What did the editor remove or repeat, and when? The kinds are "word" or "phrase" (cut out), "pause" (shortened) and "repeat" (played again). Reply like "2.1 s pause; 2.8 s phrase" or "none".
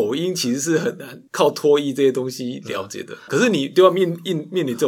1.3 s pause; 3.3 s word